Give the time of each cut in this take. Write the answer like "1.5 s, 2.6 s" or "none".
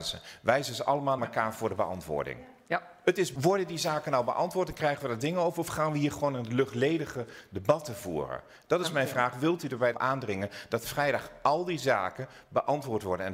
1.2 s, 3.3 s, 9.9 s